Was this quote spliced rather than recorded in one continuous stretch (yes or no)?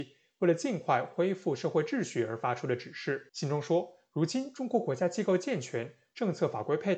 yes